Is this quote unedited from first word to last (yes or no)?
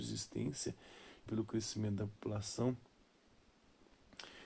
no